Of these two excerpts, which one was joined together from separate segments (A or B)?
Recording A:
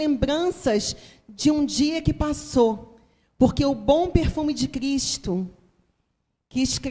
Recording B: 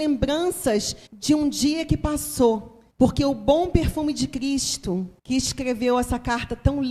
B